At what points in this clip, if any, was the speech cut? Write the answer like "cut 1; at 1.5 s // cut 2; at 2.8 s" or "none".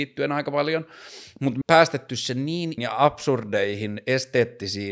cut 1; at 1.6 s // cut 2; at 2.8 s